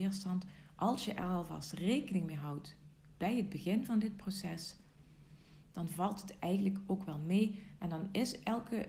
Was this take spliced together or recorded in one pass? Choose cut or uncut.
uncut